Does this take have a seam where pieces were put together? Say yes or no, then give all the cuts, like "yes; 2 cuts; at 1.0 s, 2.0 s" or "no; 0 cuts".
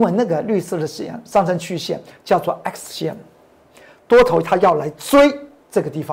no; 0 cuts